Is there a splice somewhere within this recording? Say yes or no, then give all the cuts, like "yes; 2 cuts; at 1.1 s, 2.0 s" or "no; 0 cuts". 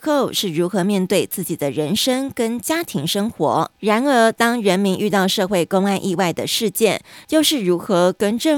yes; 1 cut; at 3.7 s